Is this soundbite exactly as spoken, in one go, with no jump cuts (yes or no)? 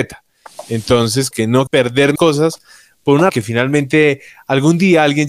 no